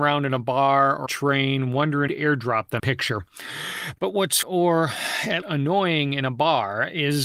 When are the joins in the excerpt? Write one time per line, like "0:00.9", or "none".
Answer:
0:01.1
0:02.1
0:02.8
0:04.4
0:05.4